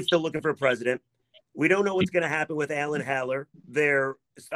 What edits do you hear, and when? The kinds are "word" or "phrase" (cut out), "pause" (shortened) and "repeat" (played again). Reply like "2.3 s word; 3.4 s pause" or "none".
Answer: none